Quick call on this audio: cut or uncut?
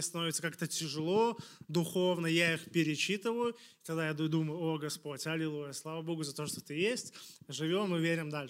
uncut